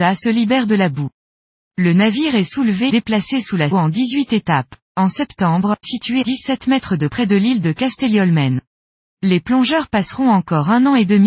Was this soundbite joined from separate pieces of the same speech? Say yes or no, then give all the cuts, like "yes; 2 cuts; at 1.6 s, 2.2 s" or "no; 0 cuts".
yes; 6 cuts; at 2.9 s, 3.7 s, 4.8 s, 5.8 s, 6.2 s, 7.1 s